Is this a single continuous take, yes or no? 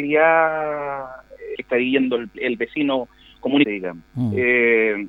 no